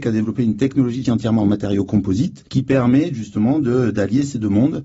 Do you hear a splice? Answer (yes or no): yes